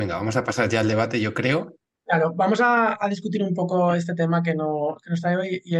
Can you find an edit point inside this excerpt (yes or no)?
no